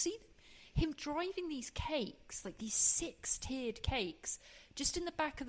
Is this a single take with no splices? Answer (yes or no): yes